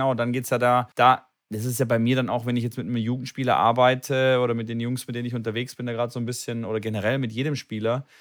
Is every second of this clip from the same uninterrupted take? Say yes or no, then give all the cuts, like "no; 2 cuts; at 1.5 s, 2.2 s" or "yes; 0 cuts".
no; 1 cut; at 0.9 s